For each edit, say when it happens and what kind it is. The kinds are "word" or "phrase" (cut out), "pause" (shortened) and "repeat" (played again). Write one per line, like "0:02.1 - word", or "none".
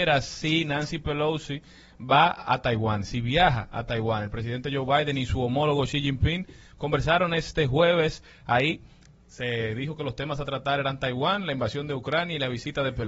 none